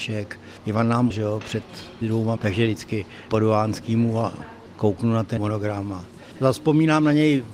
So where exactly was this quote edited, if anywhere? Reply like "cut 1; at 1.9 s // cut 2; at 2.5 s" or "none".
cut 1; at 1.1 s // cut 2; at 2.0 s // cut 3; at 2.4 s // cut 4; at 3.3 s // cut 5; at 5.4 s